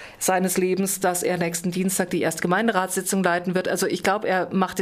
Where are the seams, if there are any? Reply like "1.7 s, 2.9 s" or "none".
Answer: none

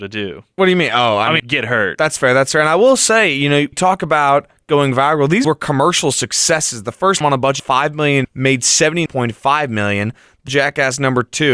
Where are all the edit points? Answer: 1.4 s, 3.7 s, 5.4 s, 7.2 s, 7.6 s, 8.2 s, 9.1 s, 10.5 s

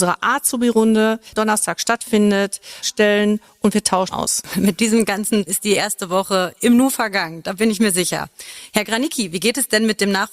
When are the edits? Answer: 1.4 s, 2.8 s, 4.1 s, 5.5 s

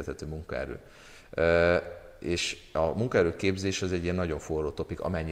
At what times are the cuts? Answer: none

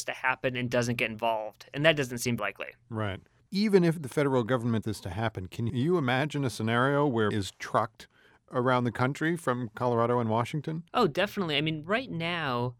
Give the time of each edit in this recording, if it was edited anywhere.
2.4 s, 3.4 s, 4.8 s, 5.7 s, 7.3 s, 10.9 s

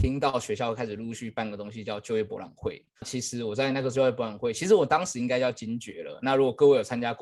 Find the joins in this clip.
3.0 s

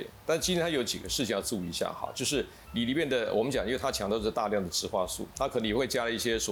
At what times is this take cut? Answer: 5.3 s

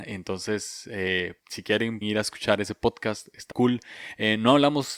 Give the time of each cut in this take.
1.4 s, 2.0 s, 3.5 s

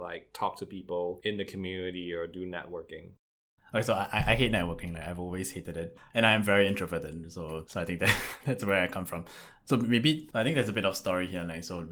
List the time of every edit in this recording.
none

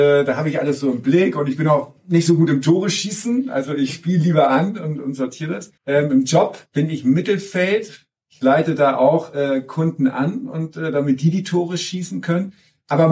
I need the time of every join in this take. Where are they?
5.8 s, 6.7 s

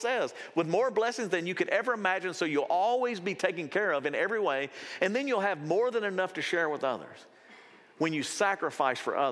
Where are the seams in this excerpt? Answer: none

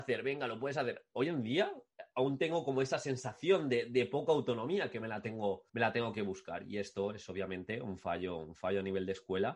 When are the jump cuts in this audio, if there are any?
5.7 s

